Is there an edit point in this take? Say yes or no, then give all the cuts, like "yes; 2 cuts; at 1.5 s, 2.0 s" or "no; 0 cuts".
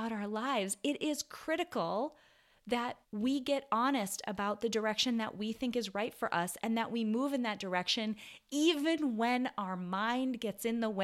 yes; 1 cut; at 3.0 s